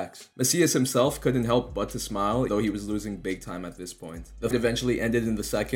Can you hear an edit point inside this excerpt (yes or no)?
yes